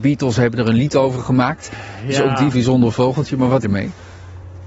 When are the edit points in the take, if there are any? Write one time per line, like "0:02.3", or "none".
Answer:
0:02.5
0:03.6